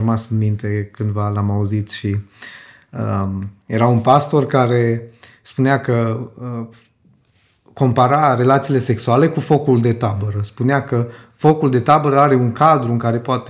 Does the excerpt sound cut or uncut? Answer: uncut